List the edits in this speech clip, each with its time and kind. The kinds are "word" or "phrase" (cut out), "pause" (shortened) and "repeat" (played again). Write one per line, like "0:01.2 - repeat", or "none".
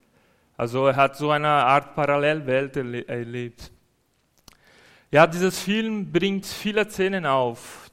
none